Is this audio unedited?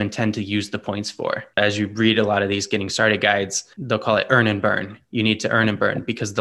no; 2 cuts; at 1.5 s, 3.7 s

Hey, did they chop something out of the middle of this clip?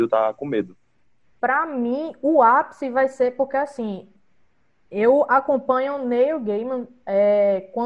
no; 0 cuts

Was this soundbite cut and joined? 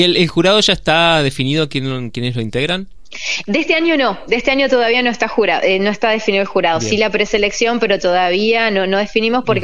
no; 0 cuts

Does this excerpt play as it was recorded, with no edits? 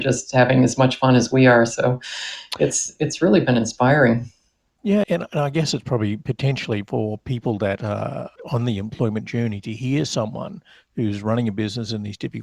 no; 2 cuts; at 5.0 s, 8.4 s

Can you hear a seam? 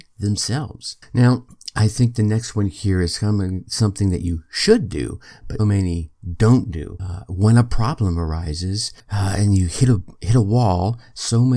yes; 1 cut; at 5.6 s

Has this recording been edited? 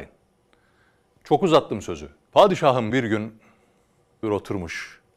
yes; 2 cuts; at 2.9 s, 4.2 s

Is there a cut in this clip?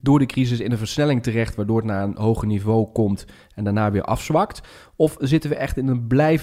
no; 0 cuts

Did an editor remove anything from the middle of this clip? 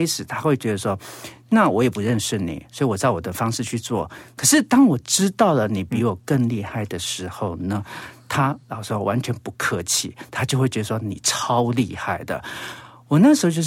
no; 0 cuts

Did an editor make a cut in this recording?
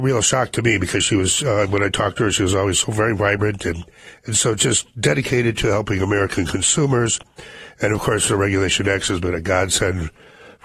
no; 0 cuts

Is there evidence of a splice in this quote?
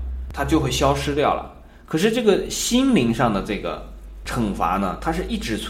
no; 0 cuts

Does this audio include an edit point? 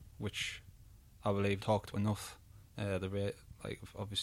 yes; 2 cuts; at 1.6 s, 1.9 s

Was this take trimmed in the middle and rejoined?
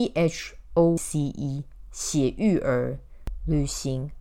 yes; 1 cut; at 1.0 s

